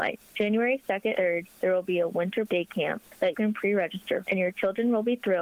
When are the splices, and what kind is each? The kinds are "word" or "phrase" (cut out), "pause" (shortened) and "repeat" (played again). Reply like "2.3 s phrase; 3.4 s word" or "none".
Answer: 1.1 s word; 2.4 s word; 3.3 s word; 4.2 s word